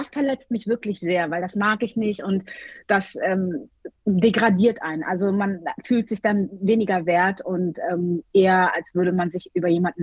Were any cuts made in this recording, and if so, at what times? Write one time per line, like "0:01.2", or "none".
0:04.0